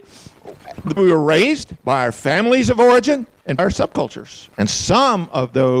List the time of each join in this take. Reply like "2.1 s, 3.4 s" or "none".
1.0 s, 3.6 s, 4.5 s